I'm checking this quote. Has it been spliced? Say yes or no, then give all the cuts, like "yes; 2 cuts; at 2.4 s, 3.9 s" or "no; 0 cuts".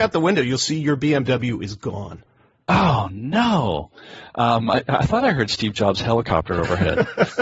no; 0 cuts